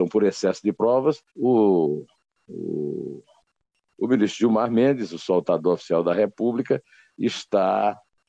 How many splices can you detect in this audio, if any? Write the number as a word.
one